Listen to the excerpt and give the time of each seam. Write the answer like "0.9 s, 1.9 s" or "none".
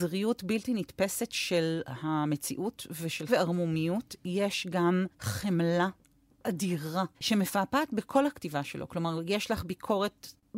3.3 s, 5.1 s, 7.1 s